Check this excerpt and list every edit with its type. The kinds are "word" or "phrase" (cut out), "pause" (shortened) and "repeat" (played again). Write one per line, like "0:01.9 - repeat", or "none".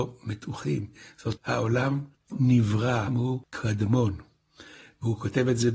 0:01.4 - word
0:02.3 - word
0:03.1 - word

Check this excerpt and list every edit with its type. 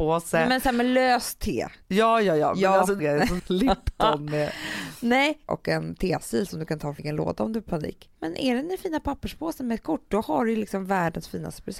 0:01.8 - pause
0:03.0 - word
0:03.4 - word
0:05.5 - phrase
0:07.0 - word
0:08.1 - pause

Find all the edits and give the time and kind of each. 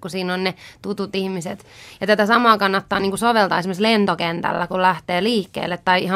none

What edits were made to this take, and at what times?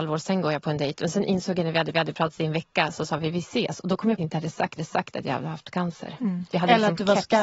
0:01.9 - repeat
0:04.2 - phrase
0:04.8 - repeat

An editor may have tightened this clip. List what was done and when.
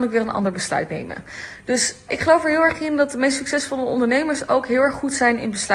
0:02.1 - word

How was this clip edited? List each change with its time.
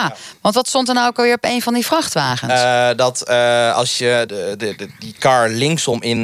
0:04.3 - word

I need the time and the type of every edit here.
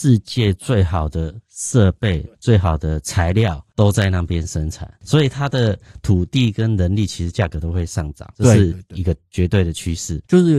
0:02.3 - pause

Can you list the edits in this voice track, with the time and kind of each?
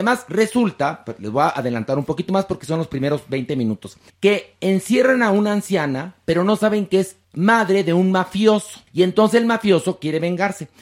0:04.1 - pause
0:07.2 - pause
0:08.9 - pause

